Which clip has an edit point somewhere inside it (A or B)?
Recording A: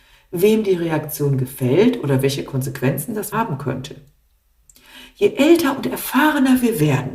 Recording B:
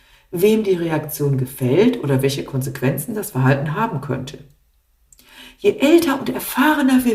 A